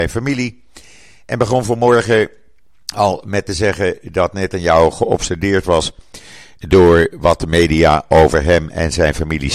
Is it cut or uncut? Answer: uncut